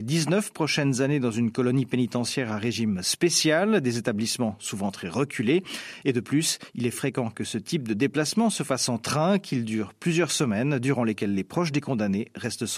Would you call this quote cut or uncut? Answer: uncut